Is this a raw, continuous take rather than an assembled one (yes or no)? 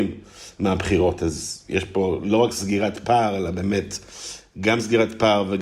yes